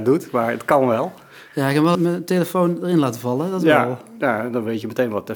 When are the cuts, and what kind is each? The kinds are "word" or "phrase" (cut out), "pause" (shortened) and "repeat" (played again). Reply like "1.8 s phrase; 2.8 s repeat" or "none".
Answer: 1.9 s word